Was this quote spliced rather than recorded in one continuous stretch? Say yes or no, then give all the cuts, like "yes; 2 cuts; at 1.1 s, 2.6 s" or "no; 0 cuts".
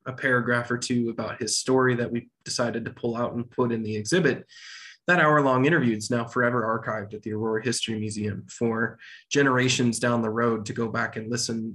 no; 0 cuts